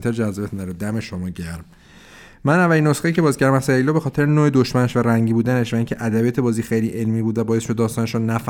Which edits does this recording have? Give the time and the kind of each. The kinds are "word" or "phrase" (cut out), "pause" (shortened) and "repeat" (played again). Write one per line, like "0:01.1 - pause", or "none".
none